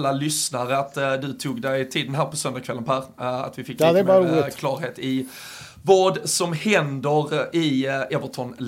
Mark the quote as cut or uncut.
uncut